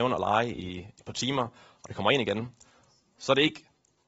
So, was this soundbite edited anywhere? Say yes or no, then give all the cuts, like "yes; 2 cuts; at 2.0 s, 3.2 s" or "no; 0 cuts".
no; 0 cuts